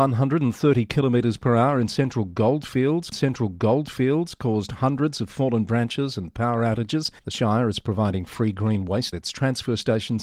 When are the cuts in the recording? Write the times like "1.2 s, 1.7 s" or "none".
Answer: 3.1 s, 7.2 s, 9.1 s